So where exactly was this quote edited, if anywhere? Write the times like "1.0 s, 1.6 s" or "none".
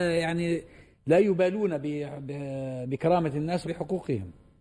3.6 s